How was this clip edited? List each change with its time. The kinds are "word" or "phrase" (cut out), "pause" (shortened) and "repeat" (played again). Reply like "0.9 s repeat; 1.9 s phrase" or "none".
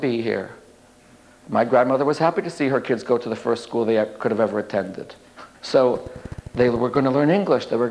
5.5 s pause